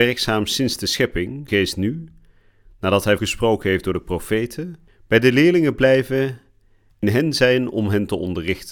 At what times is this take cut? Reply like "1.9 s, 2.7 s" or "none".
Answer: 1.5 s, 3.2 s, 4.9 s, 7.0 s